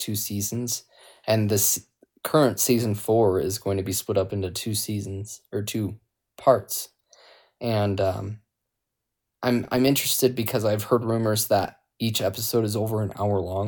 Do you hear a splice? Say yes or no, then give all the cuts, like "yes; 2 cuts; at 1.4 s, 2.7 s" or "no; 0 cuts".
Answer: no; 0 cuts